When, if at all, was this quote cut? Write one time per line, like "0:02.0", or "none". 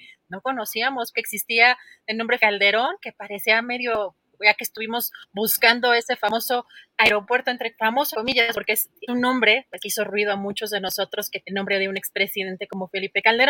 0:01.1
0:02.4
0:08.1
0:08.5
0:09.1
0:09.8
0:11.4